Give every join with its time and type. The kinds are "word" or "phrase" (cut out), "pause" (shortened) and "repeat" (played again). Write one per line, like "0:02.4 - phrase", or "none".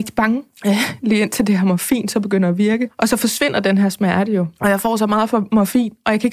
none